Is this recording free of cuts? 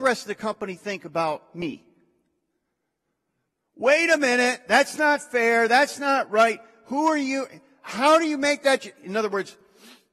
yes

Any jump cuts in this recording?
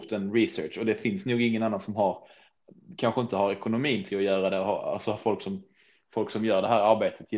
no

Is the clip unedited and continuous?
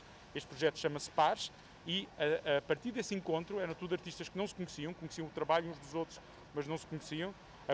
yes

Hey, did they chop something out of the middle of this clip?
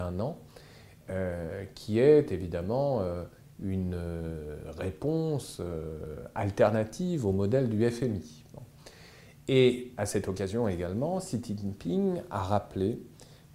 no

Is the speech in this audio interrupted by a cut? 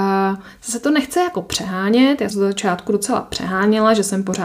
yes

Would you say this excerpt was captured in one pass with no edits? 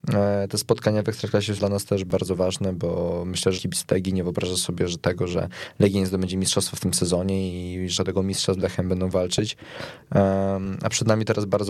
no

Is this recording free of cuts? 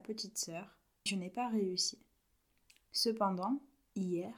no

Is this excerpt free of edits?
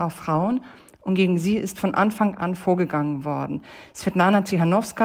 yes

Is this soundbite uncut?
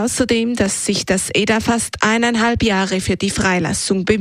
yes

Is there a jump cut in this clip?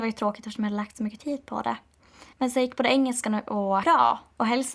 yes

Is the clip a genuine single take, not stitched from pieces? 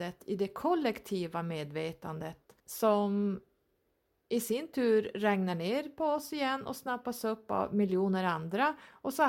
no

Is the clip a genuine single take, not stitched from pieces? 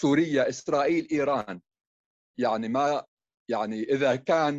no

